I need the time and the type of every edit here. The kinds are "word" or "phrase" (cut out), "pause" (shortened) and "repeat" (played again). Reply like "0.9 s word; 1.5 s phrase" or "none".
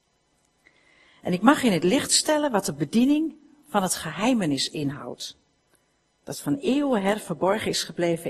none